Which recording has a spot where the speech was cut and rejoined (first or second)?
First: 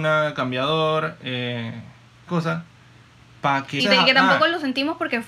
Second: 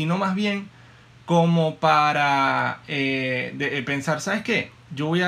first